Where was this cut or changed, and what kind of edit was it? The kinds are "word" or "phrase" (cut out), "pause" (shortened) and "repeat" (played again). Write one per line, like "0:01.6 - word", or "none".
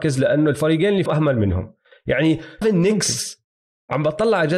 0:01.1 - word
0:02.6 - word